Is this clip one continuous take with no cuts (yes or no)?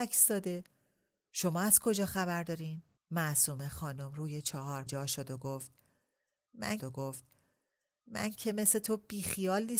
no